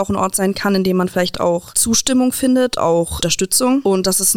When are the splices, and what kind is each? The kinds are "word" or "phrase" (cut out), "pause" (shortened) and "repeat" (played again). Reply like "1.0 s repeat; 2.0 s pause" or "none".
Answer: 2.8 s word